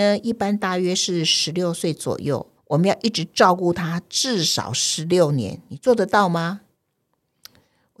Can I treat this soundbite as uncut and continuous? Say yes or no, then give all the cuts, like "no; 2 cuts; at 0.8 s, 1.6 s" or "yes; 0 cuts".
no; 1 cut; at 2.6 s